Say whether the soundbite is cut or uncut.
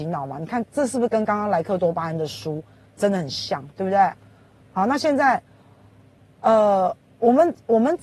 uncut